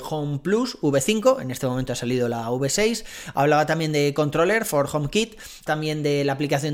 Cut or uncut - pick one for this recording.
cut